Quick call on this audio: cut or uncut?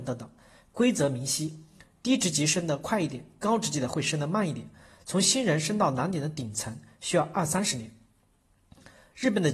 uncut